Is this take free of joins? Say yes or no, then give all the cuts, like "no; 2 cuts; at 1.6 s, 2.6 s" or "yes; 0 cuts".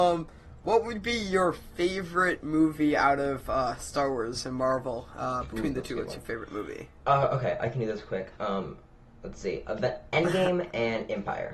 yes; 0 cuts